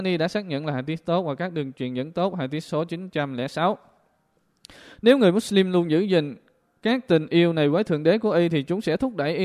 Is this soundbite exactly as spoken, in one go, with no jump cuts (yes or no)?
yes